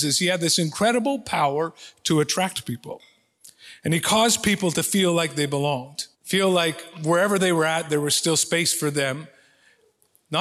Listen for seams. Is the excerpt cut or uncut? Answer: cut